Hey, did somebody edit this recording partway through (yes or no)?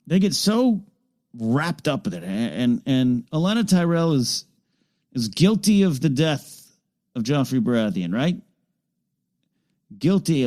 no